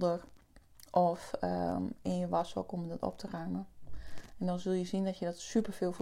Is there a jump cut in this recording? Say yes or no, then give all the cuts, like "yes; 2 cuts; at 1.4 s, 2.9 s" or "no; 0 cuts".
no; 0 cuts